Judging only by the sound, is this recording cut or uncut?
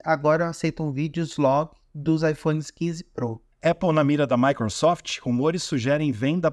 cut